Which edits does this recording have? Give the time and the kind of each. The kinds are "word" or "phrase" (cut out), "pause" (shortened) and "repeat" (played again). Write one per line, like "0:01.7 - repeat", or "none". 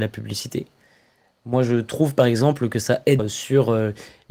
0:03.2 - word